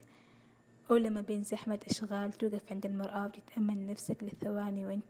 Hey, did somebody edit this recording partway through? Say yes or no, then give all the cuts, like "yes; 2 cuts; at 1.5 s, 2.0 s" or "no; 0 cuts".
no; 0 cuts